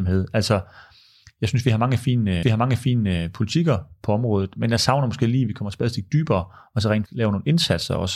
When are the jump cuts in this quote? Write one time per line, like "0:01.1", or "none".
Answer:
0:02.4
0:07.1